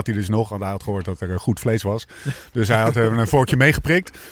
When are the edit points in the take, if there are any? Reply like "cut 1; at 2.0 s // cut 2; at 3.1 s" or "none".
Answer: none